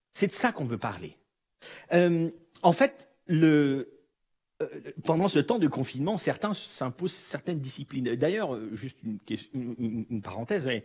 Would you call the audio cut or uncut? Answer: cut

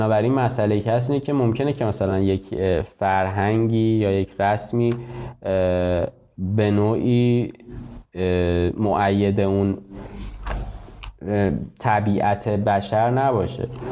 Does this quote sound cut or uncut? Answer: uncut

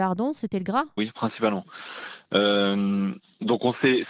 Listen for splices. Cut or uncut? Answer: cut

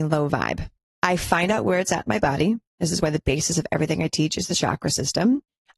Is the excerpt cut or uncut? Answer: uncut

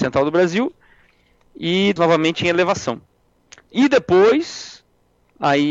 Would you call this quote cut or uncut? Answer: cut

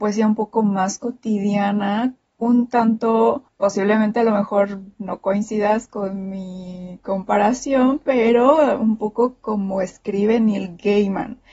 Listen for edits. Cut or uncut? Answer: uncut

